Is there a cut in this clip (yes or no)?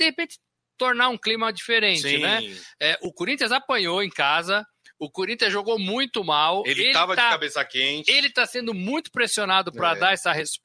no